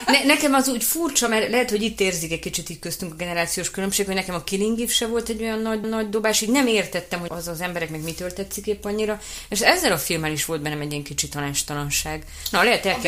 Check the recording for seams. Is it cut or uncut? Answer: cut